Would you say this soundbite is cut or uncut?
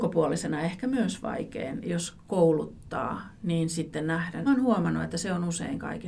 cut